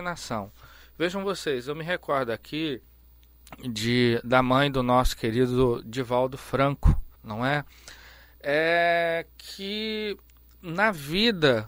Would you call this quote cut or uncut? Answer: cut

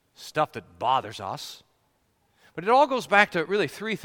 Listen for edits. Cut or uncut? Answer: uncut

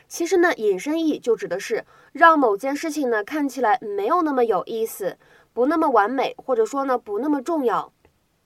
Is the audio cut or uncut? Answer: uncut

